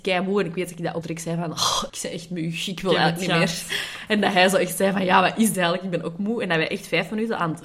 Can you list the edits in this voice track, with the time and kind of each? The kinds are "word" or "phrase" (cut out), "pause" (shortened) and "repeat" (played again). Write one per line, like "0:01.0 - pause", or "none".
0:01.0 - word
0:01.9 - word
0:05.5 - word